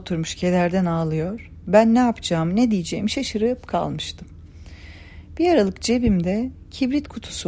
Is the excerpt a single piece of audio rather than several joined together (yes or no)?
yes